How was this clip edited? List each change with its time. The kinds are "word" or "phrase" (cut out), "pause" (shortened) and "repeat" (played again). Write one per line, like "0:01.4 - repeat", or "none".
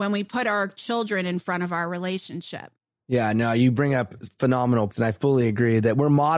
0:04.9 - word